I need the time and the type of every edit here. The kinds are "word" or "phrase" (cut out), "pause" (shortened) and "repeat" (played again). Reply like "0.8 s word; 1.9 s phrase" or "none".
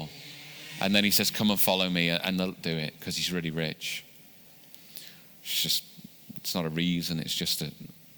2.6 s phrase